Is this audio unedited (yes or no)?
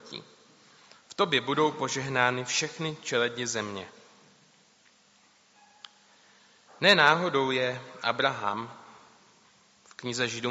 yes